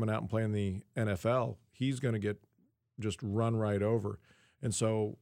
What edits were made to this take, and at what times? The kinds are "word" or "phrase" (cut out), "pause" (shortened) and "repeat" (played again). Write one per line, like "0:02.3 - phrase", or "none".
none